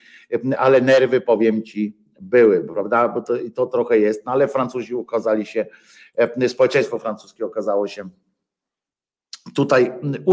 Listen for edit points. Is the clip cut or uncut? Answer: uncut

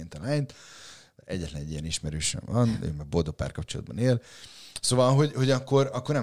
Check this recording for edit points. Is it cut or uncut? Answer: uncut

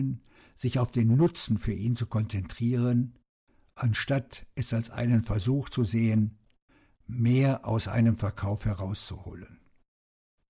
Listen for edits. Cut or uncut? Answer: uncut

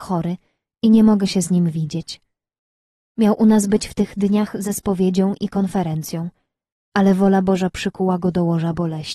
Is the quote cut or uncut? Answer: uncut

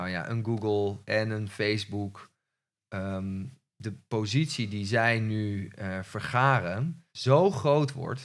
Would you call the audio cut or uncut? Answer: cut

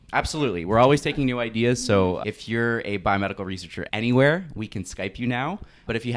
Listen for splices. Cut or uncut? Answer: uncut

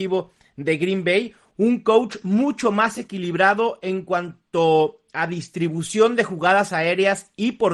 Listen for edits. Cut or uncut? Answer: uncut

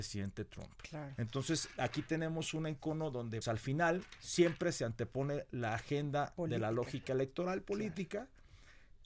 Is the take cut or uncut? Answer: cut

